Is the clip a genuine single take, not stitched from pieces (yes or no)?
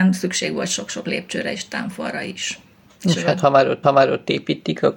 no